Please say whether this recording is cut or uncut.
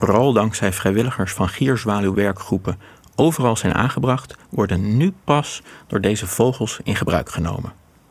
uncut